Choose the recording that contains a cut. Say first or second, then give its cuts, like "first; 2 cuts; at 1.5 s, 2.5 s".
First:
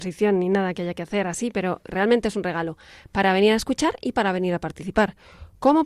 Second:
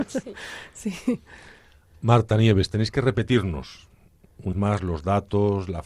second; 1 cut; at 4.5 s